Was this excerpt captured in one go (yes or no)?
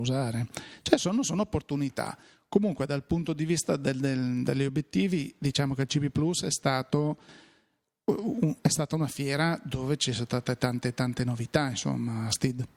yes